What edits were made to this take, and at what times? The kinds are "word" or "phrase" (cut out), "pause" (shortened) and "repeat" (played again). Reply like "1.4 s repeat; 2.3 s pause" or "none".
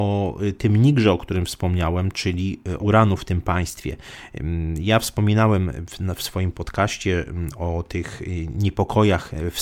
2.8 s phrase